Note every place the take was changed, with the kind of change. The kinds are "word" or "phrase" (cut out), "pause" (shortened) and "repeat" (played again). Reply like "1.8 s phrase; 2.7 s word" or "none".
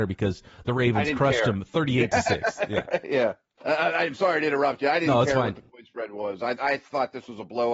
none